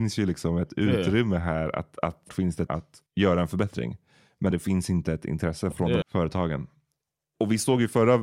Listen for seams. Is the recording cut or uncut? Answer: cut